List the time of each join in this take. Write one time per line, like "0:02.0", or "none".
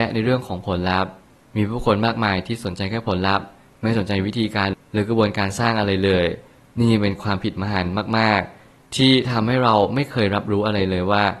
none